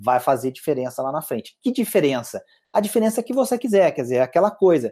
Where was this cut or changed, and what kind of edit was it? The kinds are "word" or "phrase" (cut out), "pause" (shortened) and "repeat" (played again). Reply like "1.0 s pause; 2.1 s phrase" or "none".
none